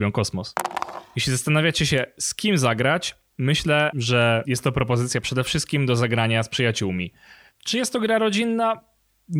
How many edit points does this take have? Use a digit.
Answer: 0